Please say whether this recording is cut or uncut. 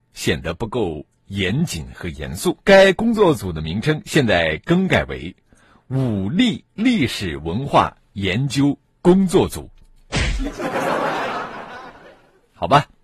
cut